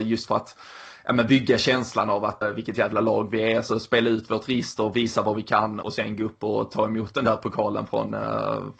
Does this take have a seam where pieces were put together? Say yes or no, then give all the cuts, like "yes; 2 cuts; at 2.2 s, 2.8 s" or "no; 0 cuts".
yes; 2 cuts; at 2.4 s, 5.8 s